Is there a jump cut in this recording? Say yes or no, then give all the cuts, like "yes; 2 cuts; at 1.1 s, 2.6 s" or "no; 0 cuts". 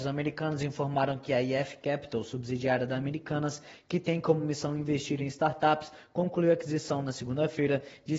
no; 0 cuts